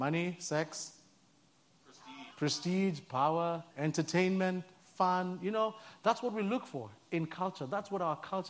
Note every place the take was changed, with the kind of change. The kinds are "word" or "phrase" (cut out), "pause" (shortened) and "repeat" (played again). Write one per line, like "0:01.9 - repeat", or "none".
0:02.3 - pause
0:03.7 - pause